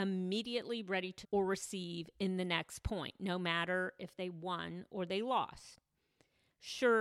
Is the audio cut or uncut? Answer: cut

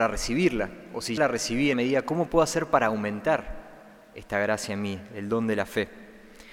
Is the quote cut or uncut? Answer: cut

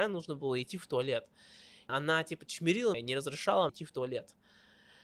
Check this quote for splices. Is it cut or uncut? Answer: cut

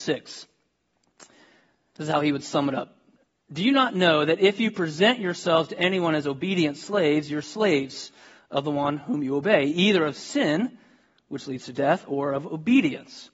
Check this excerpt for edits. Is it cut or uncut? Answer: uncut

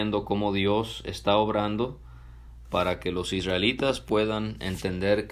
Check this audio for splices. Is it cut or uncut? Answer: uncut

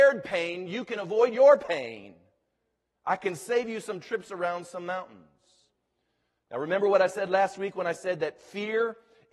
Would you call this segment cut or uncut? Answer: uncut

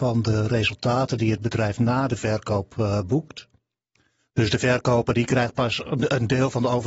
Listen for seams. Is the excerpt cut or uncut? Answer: uncut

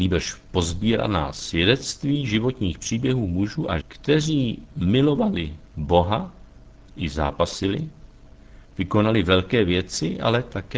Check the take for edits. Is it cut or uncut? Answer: cut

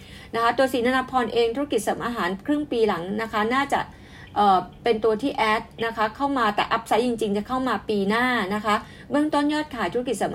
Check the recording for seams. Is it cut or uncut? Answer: uncut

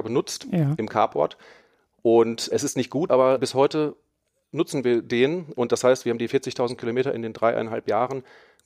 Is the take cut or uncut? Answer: uncut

